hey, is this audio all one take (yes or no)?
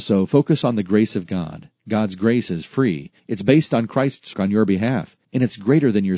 no